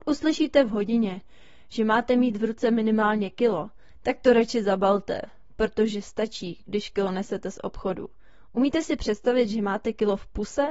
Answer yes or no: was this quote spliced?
no